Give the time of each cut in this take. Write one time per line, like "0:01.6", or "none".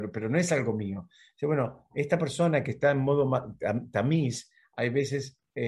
none